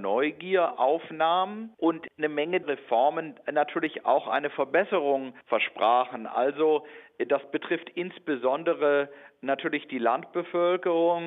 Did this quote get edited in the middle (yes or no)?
yes